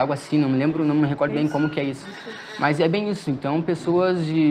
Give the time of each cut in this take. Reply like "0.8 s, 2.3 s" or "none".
1.3 s